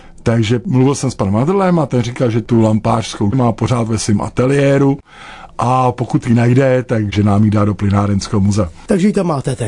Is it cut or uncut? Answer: cut